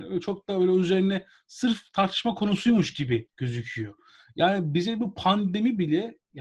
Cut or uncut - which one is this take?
cut